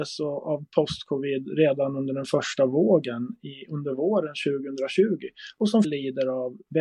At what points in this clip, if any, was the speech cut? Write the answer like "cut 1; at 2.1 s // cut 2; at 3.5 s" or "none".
cut 1; at 5.8 s